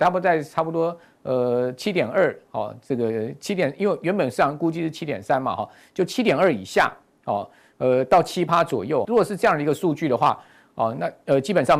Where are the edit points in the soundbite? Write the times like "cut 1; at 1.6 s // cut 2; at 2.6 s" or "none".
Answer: cut 1; at 9.0 s